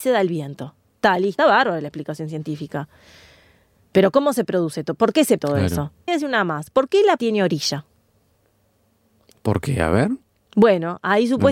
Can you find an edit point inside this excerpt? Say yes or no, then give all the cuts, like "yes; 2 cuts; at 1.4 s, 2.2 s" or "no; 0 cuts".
yes; 4 cuts; at 1.4 s, 5.4 s, 6.1 s, 7.2 s